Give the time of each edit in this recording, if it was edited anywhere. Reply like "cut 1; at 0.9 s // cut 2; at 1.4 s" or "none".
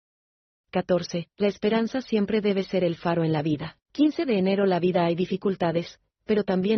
cut 1; at 3.8 s